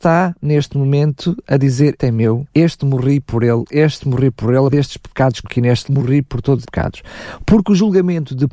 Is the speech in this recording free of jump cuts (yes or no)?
no